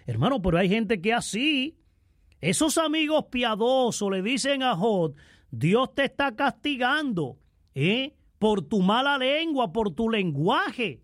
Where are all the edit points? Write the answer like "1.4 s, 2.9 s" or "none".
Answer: none